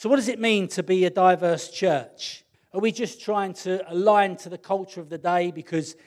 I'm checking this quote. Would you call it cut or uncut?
cut